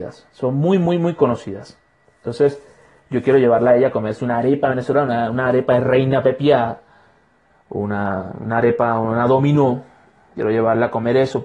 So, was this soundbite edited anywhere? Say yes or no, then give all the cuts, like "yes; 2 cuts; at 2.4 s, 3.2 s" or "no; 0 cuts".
no; 0 cuts